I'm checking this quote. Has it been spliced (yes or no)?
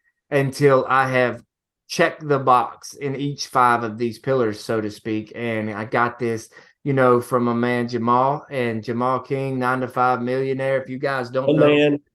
no